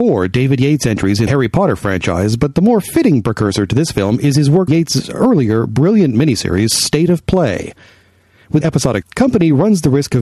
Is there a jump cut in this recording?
yes; 4 cuts; at 1.3 s, 4.7 s, 8.6 s, 9.0 s

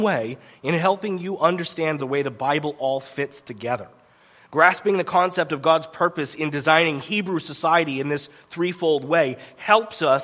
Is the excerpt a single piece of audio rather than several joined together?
yes; 0 cuts

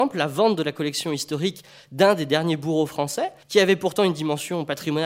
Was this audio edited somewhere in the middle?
yes; 1 cut; at 3.4 s

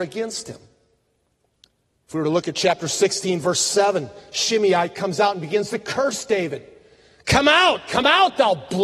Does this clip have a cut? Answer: no; 0 cuts

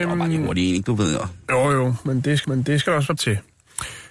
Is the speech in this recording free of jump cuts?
no; 2 cuts; at 2.4 s, 3.2 s

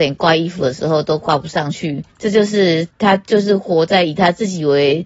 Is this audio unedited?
no; 2 cuts; at 2.1 s, 2.9 s

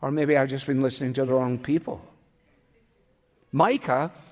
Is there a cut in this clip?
no; 0 cuts

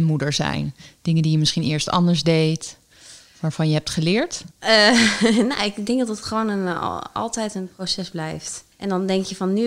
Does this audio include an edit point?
yes; 2 cuts; at 4.5 s, 8.7 s

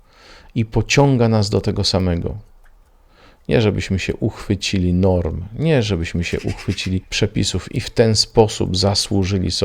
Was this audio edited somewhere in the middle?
no; 0 cuts

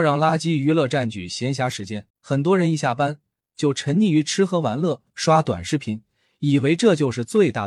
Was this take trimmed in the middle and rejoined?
yes; 2 cuts; at 2.1 s, 5.1 s

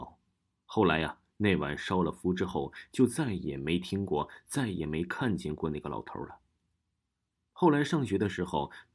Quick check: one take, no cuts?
yes; 0 cuts

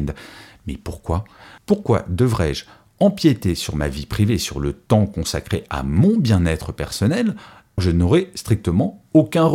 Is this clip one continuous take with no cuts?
no; 1 cut; at 7.8 s

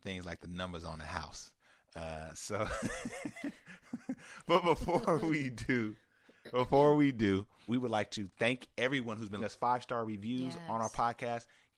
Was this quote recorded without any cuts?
no; 2 cuts; at 7.7 s, 9.4 s

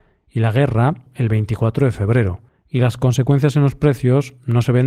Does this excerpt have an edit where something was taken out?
yes; 2 cuts; at 1.1 s, 2.5 s

